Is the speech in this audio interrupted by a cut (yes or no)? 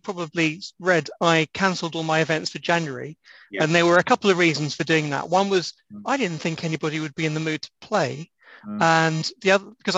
no